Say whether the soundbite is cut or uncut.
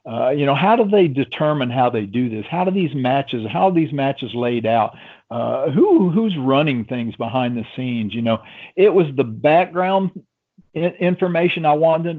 uncut